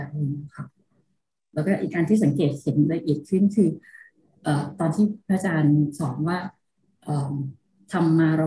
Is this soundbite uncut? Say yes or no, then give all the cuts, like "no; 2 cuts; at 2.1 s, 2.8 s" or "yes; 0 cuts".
yes; 0 cuts